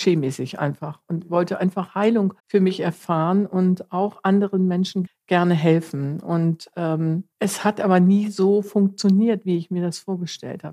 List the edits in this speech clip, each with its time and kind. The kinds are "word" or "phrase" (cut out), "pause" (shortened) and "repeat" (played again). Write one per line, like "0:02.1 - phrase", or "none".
0:02.4 - pause
0:05.1 - word
0:07.3 - pause